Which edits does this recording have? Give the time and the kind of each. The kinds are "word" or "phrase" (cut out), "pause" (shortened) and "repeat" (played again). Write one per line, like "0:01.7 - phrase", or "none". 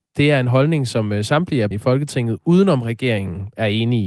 0:01.7 - word